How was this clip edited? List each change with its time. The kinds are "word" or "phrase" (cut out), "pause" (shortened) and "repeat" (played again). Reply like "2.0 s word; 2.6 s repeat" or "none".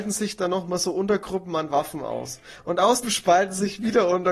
3.0 s phrase